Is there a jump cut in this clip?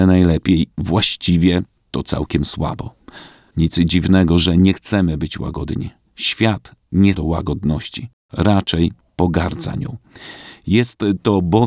yes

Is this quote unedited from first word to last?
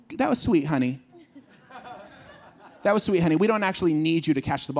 yes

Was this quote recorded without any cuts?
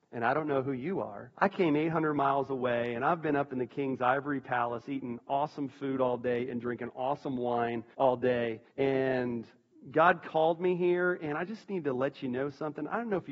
no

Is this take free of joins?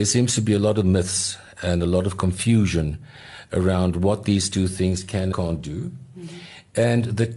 no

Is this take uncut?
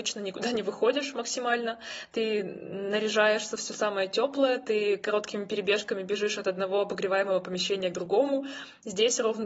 yes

